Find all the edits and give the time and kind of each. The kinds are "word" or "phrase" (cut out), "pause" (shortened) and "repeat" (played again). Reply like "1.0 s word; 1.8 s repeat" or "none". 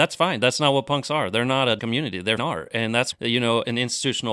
1.8 s word; 2.4 s word; 3.1 s word